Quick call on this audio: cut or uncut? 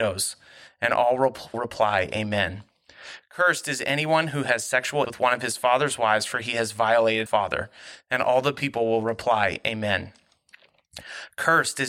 cut